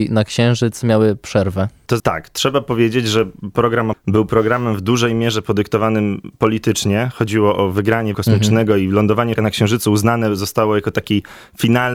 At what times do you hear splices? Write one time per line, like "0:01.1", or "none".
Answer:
0:02.0
0:03.9
0:08.1
0:09.4